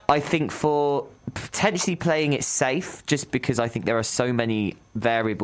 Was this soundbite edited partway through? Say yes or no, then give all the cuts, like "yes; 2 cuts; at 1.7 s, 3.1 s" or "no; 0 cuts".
no; 0 cuts